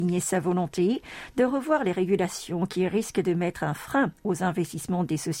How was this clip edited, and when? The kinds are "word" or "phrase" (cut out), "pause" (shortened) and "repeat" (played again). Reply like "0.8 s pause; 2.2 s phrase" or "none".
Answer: none